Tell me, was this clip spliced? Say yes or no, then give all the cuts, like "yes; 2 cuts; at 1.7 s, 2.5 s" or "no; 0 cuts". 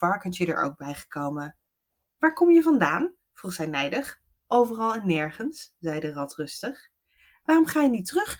no; 0 cuts